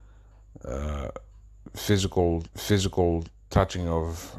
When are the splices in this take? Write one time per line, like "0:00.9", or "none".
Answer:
0:02.5